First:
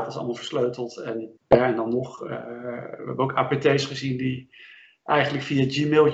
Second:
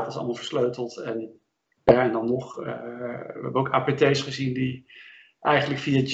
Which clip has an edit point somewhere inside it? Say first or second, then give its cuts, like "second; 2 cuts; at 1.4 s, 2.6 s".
first; 1 cut; at 1.4 s